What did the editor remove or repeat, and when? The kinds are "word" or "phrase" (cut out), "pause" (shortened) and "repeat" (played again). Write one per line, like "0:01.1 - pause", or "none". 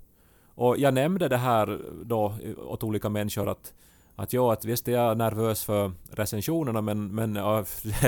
none